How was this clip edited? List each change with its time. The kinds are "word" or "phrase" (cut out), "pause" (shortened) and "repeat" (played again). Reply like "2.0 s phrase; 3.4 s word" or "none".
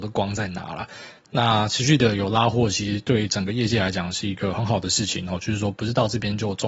none